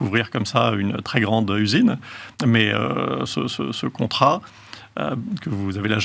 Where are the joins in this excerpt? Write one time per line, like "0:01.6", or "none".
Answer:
0:02.3